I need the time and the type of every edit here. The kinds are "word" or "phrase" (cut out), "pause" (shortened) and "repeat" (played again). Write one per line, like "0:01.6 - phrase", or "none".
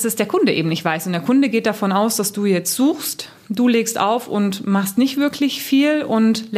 none